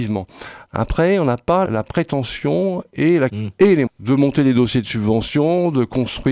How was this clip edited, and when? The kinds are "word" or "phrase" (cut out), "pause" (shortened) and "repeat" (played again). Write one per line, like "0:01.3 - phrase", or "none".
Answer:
0:01.7 - word
0:03.3 - word
0:03.9 - word